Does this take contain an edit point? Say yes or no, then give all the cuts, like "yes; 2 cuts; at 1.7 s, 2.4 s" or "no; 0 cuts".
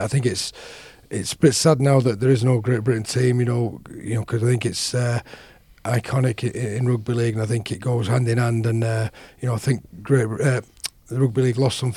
no; 0 cuts